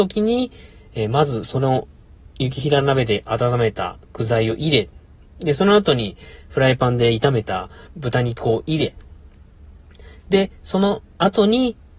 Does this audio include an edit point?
no; 0 cuts

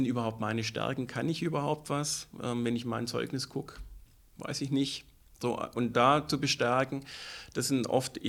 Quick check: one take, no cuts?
yes; 0 cuts

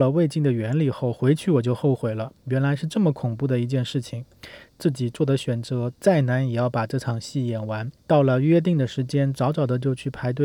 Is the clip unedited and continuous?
no; 1 cut; at 8.0 s

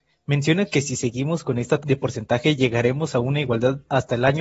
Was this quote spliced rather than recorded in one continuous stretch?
yes; 1 cut; at 1.8 s

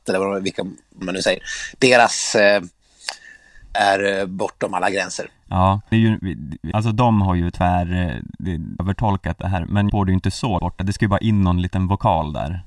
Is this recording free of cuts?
no; 7 cuts; at 1.0 s, 3.7 s, 5.9 s, 6.7 s, 8.8 s, 9.9 s, 10.6 s

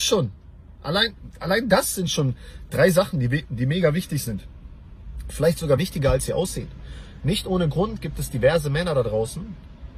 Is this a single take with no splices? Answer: yes; 0 cuts

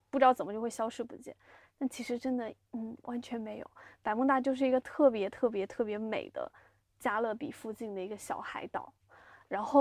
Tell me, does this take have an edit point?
no; 0 cuts

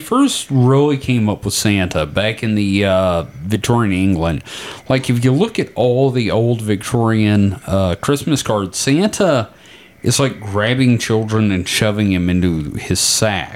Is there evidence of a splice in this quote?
no; 0 cuts

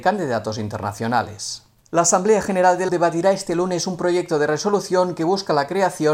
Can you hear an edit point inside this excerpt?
yes; 2 cuts; at 1.8 s, 2.9 s

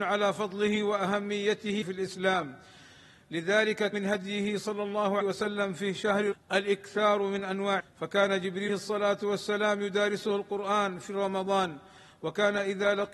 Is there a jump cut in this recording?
yes; 6 cuts; at 1.8 s, 3.9 s, 5.2 s, 6.3 s, 7.8 s, 8.7 s

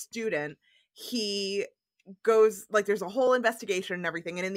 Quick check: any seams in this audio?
no; 0 cuts

